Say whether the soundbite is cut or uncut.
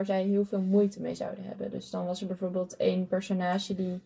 uncut